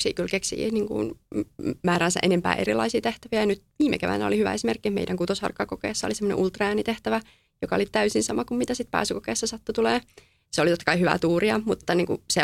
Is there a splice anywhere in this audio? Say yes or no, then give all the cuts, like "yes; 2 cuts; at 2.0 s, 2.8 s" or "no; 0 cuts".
no; 0 cuts